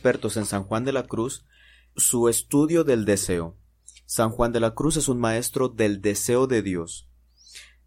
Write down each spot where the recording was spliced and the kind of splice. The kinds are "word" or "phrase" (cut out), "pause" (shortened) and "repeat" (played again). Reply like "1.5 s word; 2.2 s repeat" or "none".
2.0 s word